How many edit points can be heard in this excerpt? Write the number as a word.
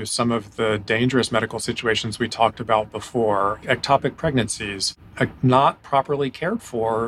one